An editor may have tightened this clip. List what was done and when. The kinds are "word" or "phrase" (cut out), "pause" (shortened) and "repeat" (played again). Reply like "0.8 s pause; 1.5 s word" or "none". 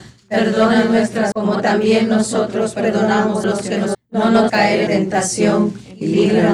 1.3 s word; 3.4 s word; 3.9 s word; 4.5 s word; 4.9 s word